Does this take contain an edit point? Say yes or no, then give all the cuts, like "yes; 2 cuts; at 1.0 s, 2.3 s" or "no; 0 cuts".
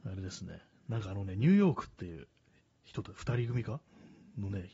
no; 0 cuts